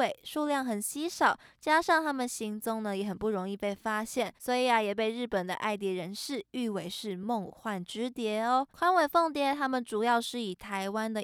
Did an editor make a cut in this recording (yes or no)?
yes